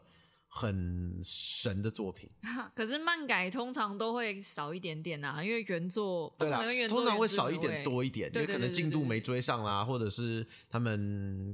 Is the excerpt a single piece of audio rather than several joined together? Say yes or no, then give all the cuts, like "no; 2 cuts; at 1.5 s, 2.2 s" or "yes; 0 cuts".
yes; 0 cuts